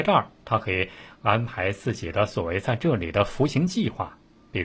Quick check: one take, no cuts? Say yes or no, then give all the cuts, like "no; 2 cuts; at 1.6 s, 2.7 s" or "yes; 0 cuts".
yes; 0 cuts